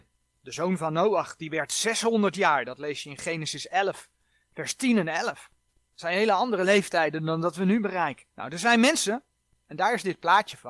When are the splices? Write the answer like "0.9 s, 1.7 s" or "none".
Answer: 8.3 s